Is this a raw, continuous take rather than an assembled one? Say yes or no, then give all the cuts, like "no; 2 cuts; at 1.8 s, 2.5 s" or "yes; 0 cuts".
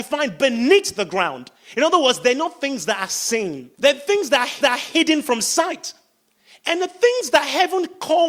no; 2 cuts; at 3.7 s, 4.6 s